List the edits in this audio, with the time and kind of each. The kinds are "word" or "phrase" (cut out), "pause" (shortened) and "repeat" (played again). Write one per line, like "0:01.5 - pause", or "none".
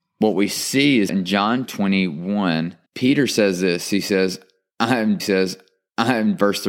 0:01.1 - word
0:01.6 - word
0:02.9 - pause
0:05.2 - repeat